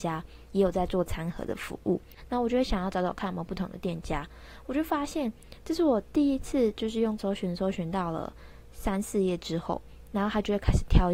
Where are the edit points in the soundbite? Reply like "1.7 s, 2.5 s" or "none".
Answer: 7.2 s